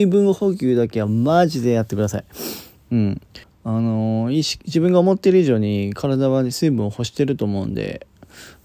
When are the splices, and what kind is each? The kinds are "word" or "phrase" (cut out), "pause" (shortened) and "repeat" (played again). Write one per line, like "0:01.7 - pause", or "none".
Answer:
0:03.4 - pause

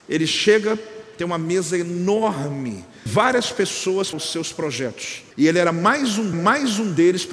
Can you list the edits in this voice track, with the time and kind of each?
0:03.1 - word
0:04.1 - word
0:05.3 - pause
0:06.3 - repeat

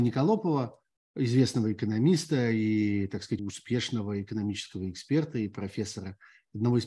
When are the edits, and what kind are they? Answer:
0:03.4 - word

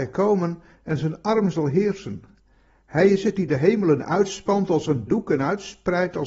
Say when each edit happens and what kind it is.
0:05.1 - word

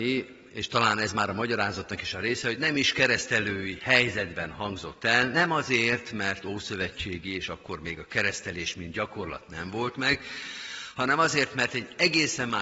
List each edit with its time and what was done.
none

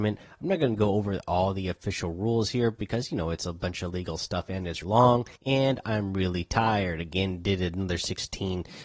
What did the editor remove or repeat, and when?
0:04.8 - word
0:05.4 - pause

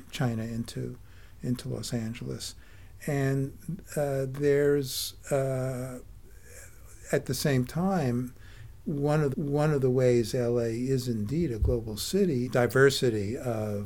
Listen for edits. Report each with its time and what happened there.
0:09.3 - repeat
0:12.5 - phrase

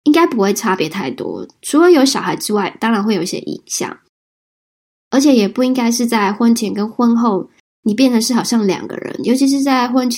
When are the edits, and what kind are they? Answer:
none

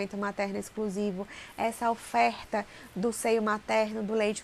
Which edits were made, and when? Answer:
none

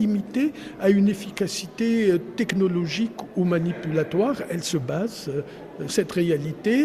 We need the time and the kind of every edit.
0:05.9 - word

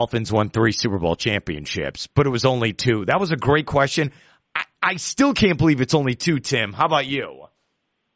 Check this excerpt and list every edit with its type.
none

